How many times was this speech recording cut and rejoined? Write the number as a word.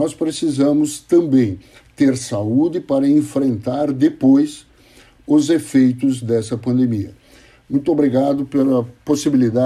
zero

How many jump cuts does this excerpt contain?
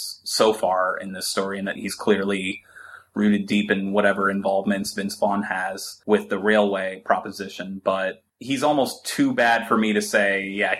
zero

